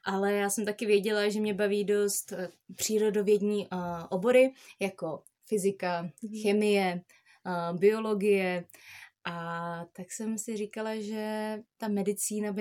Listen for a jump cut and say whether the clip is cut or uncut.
uncut